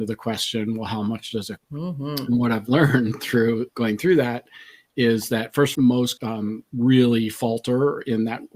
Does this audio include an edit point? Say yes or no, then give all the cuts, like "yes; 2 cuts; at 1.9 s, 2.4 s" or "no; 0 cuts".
yes; 4 cuts; at 1.6 s, 3.7 s, 5.7 s, 6.2 s